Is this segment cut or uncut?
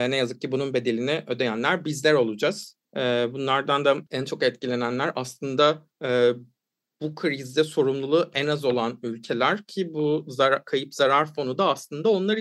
cut